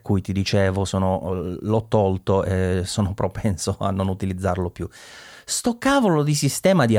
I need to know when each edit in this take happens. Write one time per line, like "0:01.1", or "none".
none